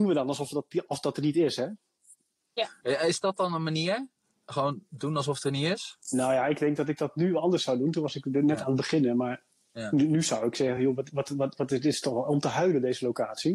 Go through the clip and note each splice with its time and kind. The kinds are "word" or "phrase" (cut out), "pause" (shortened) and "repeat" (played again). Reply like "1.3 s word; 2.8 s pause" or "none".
none